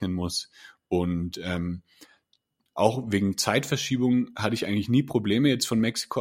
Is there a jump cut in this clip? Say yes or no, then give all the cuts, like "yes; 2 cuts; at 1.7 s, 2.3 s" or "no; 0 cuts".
no; 0 cuts